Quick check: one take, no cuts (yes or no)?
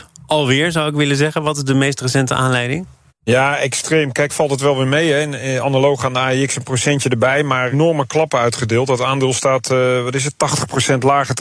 no